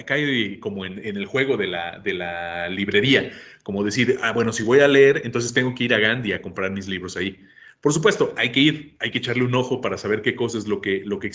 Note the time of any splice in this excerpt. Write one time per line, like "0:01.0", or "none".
none

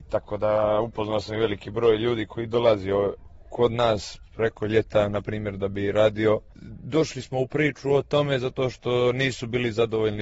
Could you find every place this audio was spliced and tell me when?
none

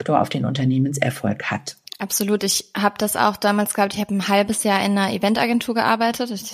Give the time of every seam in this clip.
none

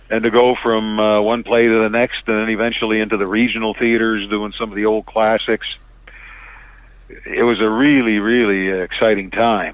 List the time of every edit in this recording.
none

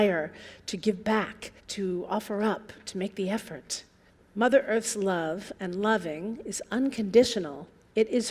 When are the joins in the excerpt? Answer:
0:01.6
0:04.1

